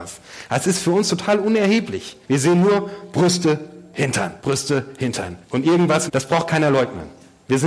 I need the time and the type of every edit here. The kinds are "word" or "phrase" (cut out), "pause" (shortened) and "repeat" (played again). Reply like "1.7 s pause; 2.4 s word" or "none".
2.2 s pause; 4.4 s pause; 5.4 s pause; 6.1 s phrase